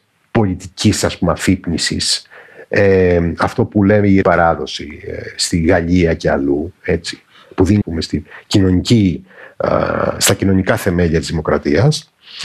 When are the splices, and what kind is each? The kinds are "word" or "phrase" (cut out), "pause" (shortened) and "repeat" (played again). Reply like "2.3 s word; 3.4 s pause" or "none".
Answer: 4.2 s word; 7.8 s phrase

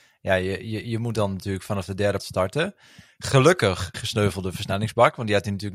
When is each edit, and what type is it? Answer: 2.2 s word; 3.9 s word

